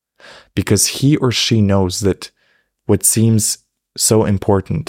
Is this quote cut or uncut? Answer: uncut